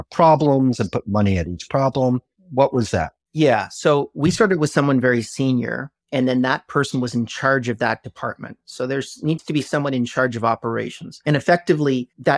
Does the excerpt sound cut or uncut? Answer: uncut